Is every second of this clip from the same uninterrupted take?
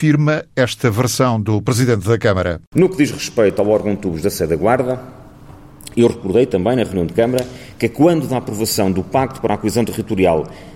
no; 1 cut; at 2.6 s

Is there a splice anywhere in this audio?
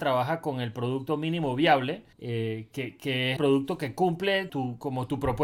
yes; 3 cuts; at 2.1 s, 3.4 s, 4.5 s

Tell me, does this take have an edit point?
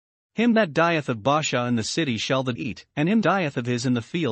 yes; 3 cuts; at 2.6 s, 2.9 s, 3.2 s

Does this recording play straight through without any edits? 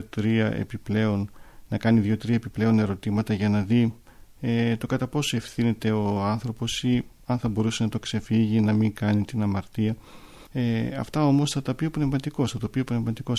yes; 0 cuts

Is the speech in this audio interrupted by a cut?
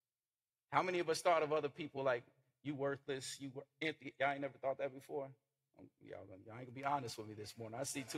no; 0 cuts

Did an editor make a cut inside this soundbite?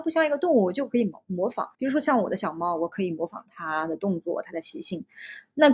yes; 1 cut; at 1.7 s

